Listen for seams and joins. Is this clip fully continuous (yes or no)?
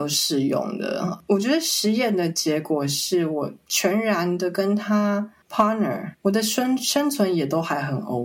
no